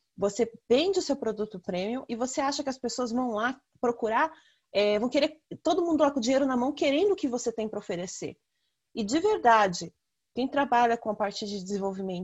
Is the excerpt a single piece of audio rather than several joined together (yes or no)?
yes